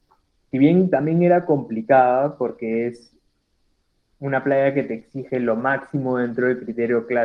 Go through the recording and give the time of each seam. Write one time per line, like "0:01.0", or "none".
none